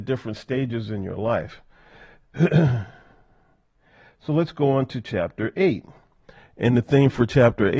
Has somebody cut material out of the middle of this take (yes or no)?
no